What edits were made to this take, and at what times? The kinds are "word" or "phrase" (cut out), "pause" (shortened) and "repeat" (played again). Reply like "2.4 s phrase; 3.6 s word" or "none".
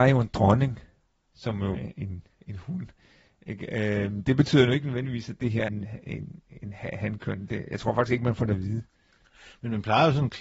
1.7 s word; 5.7 s word